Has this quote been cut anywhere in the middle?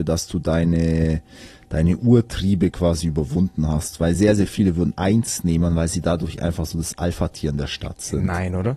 no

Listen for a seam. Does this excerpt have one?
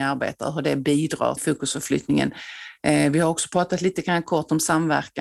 yes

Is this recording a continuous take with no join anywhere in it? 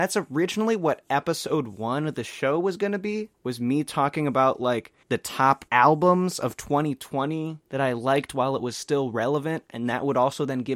no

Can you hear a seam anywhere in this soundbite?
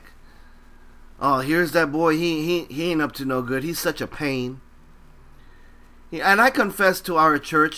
no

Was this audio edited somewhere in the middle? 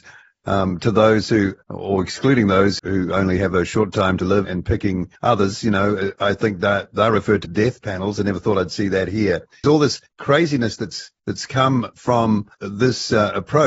yes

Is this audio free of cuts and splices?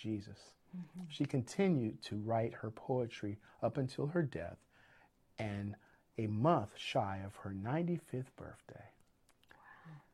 yes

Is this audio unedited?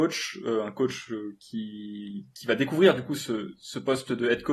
yes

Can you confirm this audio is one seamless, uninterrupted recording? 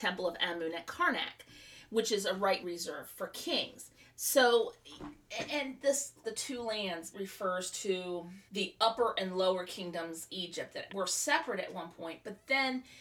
no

